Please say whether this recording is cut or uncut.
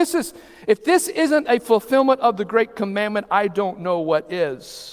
uncut